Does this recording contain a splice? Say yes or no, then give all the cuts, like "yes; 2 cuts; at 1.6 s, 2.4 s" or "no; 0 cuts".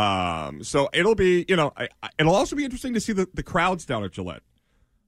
no; 0 cuts